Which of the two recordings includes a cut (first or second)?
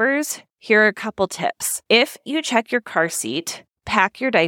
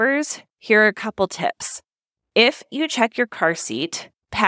first